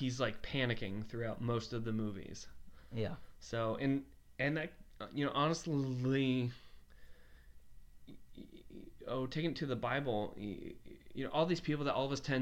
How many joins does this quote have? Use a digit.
0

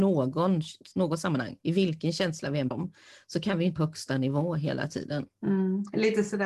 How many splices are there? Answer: 4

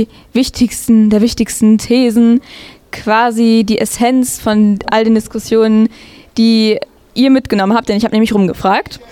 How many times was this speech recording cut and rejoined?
0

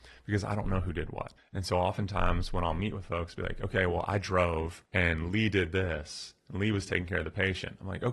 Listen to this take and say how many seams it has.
2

